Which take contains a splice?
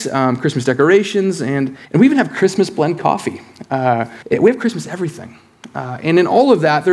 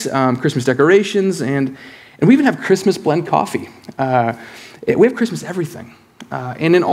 first; 2 cuts; at 1.8 s, 4.2 s

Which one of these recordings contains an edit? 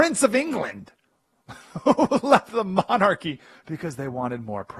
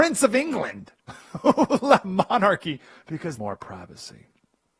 second; 3 cuts; at 1.0 s, 2.0 s, 3.4 s

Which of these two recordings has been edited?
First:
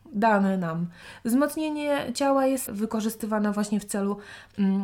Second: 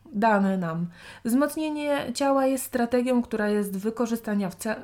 first; 1 cut; at 2.7 s

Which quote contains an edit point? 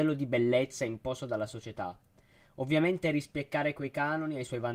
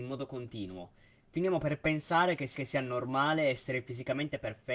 second; 1 cut; at 2.5 s

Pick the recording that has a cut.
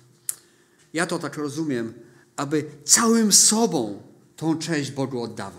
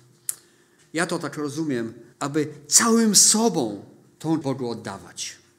second; 2 cuts; at 2.1 s, 4.4 s

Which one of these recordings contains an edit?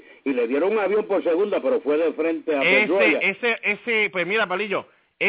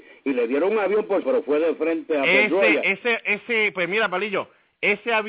second; 1 cut; at 1.2 s

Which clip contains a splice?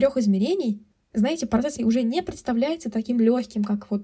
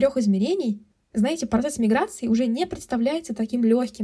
first; 1 cut; at 1.8 s

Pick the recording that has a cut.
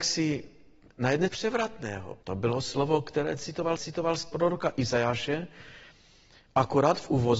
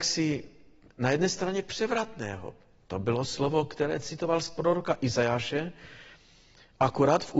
first; 3 cuts; at 1.3 s, 2.2 s, 3.8 s

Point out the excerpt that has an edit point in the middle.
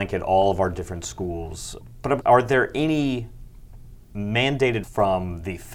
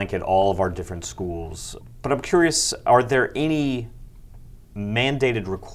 first; 2 cuts; at 2.2 s, 4.8 s

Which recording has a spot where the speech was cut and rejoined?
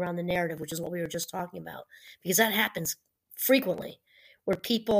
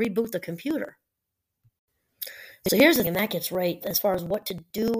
second; 2 cuts; at 3.0 s, 3.8 s

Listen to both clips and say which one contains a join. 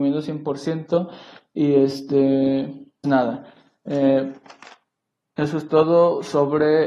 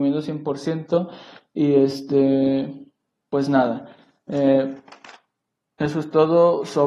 first; 1 cut; at 3.0 s

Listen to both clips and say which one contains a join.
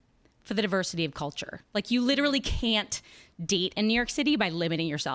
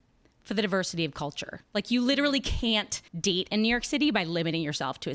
second; 1 cut; at 3.1 s

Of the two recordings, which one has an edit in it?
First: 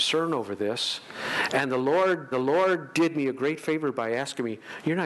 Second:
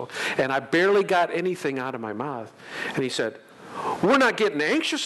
first; 1 cut; at 2.3 s

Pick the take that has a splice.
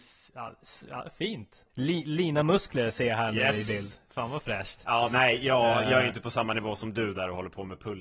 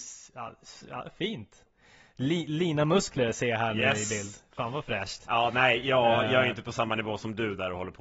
first; 1 cut; at 1.7 s

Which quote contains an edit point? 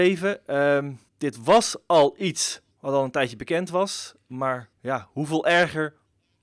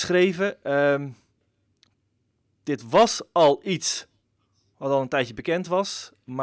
first; 3 cuts; at 1.1 s, 2.7 s, 4.7 s

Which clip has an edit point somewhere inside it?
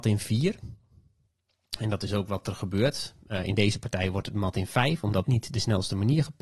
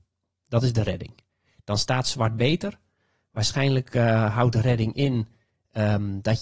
first; 1 cut; at 5.2 s

